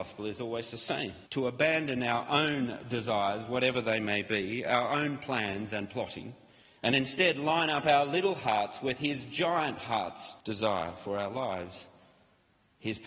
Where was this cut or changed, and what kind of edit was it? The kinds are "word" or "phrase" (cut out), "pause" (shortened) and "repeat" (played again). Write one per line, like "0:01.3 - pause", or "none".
0:01.3 - pause
0:06.6 - pause
0:10.4 - pause